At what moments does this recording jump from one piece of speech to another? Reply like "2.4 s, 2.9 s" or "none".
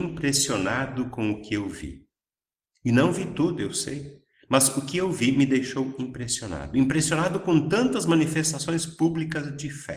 none